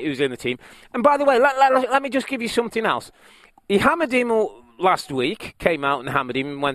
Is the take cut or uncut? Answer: uncut